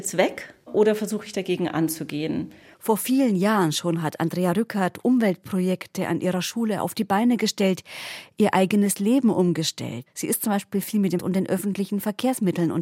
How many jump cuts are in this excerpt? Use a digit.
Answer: 1